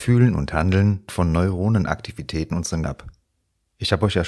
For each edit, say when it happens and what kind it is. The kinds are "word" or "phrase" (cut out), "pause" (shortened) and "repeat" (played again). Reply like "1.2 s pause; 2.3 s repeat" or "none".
1.1 s word; 2.5 s word; 2.8 s word